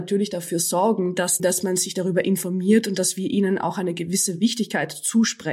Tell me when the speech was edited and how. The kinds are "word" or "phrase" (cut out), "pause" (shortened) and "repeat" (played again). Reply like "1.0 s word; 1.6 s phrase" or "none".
1.4 s phrase